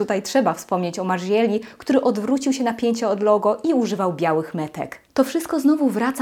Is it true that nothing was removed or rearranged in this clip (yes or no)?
yes